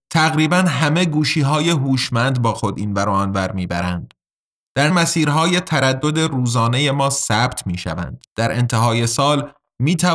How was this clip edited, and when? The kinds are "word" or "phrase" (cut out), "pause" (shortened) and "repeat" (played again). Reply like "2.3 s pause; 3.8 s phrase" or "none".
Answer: 4.9 s word; 8.3 s pause